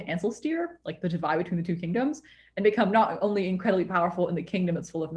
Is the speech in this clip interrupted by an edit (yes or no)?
no